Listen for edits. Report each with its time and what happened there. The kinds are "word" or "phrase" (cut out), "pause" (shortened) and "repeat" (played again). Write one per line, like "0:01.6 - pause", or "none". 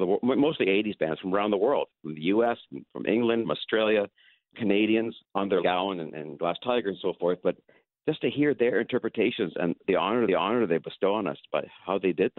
0:03.4 - phrase
0:04.5 - phrase
0:05.2 - pause
0:05.6 - word
0:09.8 - word
0:10.3 - repeat